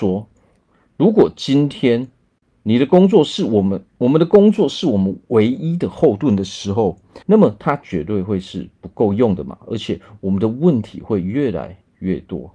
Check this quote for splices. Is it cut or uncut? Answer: cut